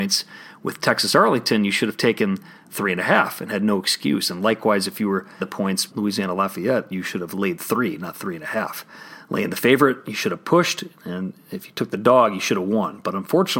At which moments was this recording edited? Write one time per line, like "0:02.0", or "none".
0:05.4
0:05.9